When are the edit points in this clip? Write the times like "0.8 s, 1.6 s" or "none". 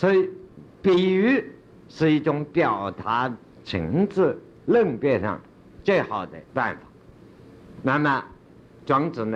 6.5 s